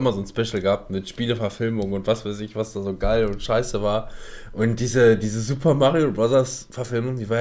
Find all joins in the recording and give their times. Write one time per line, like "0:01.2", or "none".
none